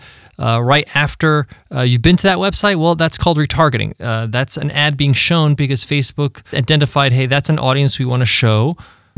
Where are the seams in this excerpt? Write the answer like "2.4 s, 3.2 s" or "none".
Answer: 6.5 s